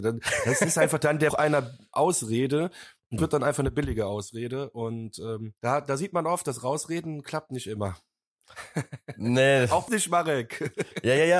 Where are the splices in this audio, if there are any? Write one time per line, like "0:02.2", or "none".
0:01.3
0:03.2
0:05.6
0:09.9